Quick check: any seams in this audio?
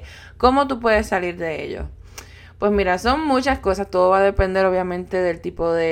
no; 0 cuts

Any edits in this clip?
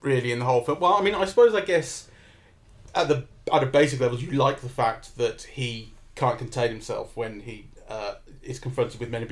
no; 0 cuts

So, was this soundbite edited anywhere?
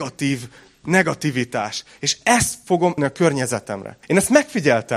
yes; 2 cuts; at 3.0 s, 4.0 s

